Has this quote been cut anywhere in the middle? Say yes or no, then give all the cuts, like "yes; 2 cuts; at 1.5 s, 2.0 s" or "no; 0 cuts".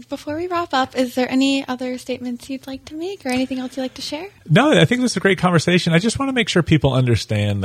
no; 0 cuts